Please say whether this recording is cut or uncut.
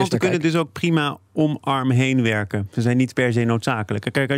uncut